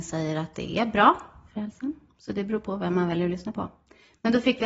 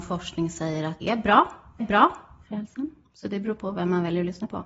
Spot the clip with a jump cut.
second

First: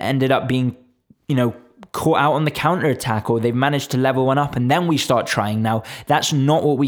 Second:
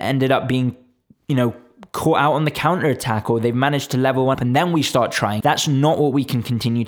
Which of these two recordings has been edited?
second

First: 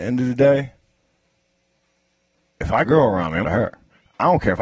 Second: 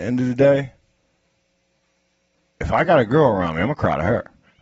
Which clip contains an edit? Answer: first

